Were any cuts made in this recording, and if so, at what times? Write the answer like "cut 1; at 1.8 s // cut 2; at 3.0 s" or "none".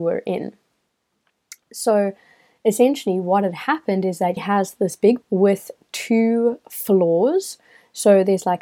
cut 1; at 4.4 s // cut 2; at 5.2 s